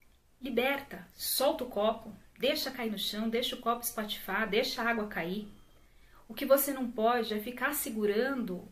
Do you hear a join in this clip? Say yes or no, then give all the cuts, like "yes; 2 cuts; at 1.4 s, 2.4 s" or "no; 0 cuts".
no; 0 cuts